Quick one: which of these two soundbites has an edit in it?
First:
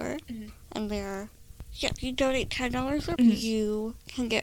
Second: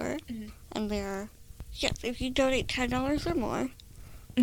first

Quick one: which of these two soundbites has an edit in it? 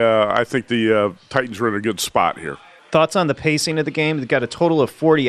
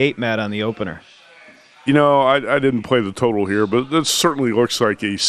first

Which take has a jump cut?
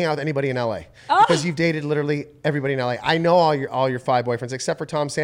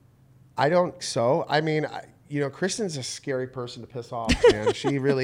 second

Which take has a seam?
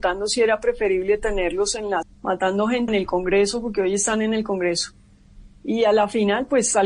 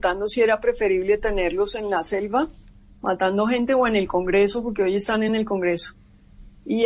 first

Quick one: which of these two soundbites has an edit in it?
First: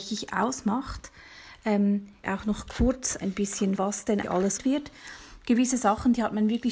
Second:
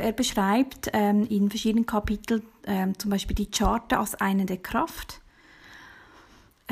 first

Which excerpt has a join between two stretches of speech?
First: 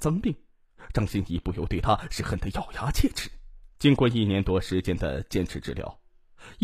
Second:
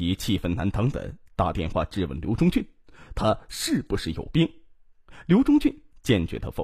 first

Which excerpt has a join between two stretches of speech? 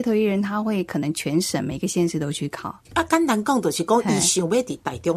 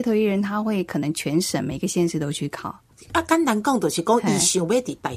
first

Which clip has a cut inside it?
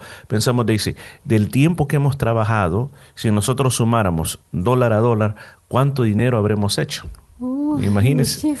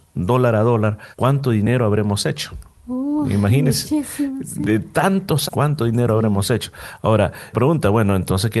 second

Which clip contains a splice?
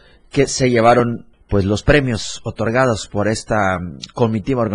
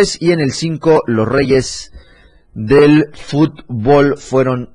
first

